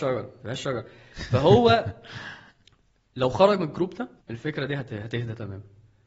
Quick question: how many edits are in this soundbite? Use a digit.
1